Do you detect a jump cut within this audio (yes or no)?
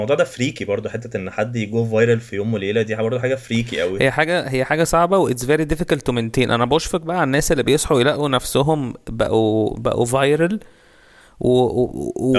no